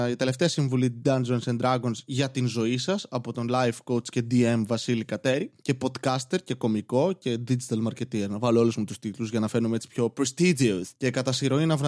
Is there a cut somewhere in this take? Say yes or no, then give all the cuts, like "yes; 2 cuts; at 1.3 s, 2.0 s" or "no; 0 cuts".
yes; 1 cut; at 11.0 s